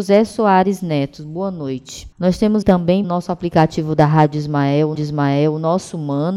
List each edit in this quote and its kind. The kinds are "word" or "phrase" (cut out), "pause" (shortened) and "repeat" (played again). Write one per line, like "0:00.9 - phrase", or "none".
0:02.1 - pause
0:02.6 - word
0:03.0 - word
0:04.9 - repeat